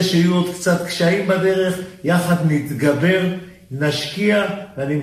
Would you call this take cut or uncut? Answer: uncut